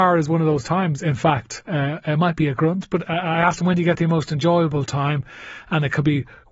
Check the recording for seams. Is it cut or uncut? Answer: uncut